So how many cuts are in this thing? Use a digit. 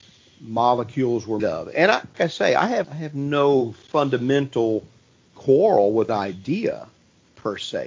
4